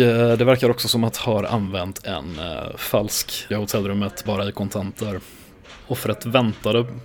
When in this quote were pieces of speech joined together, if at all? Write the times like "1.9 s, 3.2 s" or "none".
1.1 s, 3.5 s, 4.3 s